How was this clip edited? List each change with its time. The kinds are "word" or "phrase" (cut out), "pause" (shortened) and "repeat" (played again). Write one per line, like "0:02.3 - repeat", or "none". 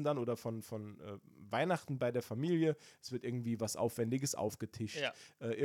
none